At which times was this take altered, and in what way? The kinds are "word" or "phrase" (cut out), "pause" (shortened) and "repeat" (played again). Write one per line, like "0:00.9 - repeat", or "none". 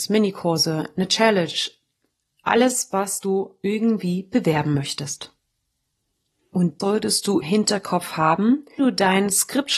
0:06.8 - word
0:07.4 - word
0:08.8 - word